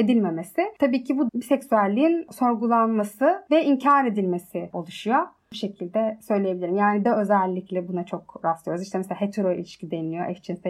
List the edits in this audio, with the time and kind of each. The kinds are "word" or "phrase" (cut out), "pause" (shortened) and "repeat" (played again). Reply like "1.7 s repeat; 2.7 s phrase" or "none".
1.3 s word; 4.7 s word; 7.0 s word